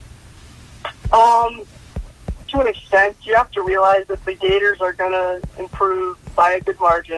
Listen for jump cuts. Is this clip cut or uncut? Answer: cut